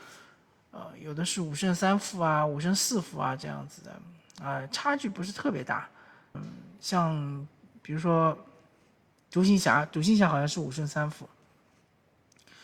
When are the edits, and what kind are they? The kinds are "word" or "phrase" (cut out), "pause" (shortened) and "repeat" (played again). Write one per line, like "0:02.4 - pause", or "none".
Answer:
0:06.3 - phrase

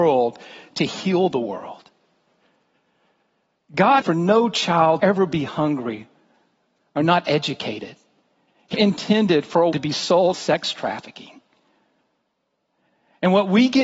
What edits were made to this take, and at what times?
0:04.0 - word
0:05.0 - word
0:08.7 - word
0:09.7 - word
0:10.3 - word

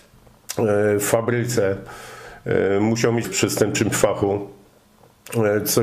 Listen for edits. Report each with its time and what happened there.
0:03.2 - word

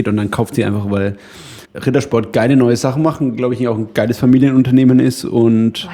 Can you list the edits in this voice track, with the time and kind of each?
0:01.7 - pause

